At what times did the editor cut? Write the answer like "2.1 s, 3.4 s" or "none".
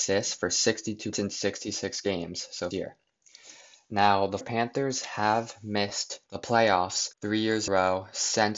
1.1 s, 2.7 s, 4.4 s, 6.3 s, 7.1 s, 7.7 s